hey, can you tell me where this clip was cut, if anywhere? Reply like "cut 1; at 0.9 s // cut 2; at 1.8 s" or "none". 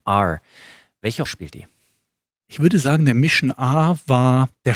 cut 1; at 1.2 s